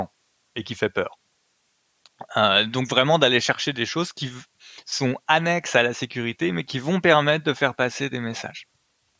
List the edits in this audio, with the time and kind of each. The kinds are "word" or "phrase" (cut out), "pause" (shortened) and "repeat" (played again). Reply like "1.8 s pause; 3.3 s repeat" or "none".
none